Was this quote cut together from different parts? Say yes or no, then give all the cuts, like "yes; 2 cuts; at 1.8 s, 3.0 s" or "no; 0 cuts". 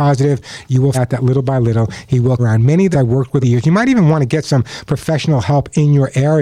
yes; 4 cuts; at 0.9 s, 2.4 s, 2.9 s, 3.4 s